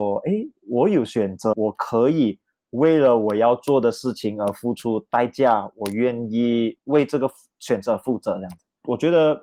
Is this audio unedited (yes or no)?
no